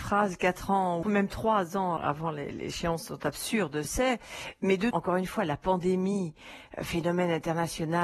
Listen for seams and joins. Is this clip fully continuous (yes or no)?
no